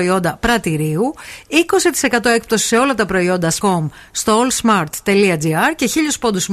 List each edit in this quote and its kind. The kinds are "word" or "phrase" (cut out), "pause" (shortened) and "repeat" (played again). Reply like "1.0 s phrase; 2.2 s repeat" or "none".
3.6 s word